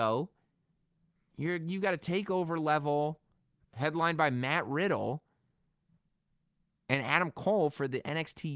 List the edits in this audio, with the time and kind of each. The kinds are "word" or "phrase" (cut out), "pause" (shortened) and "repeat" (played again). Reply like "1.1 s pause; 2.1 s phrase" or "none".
3.6 s word